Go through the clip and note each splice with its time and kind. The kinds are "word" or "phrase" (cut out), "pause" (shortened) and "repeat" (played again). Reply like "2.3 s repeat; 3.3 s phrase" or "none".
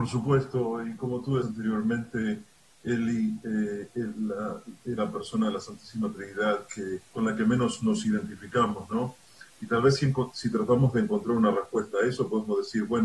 1.4 s word; 4.9 s phrase; 7.1 s pause